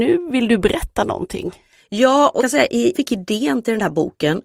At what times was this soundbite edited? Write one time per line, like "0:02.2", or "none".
0:02.4
0:02.9